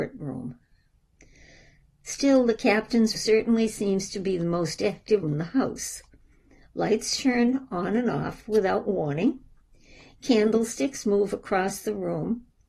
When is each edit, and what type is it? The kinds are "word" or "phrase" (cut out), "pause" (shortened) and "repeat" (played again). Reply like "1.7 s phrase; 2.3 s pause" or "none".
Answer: 3.1 s word; 5.2 s word